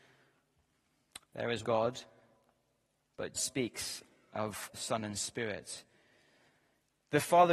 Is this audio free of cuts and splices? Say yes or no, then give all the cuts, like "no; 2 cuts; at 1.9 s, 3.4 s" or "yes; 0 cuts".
no; 3 cuts; at 1.6 s, 3.3 s, 4.7 s